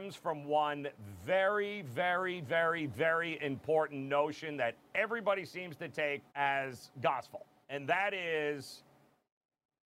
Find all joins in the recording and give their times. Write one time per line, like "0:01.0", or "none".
0:06.3
0:07.6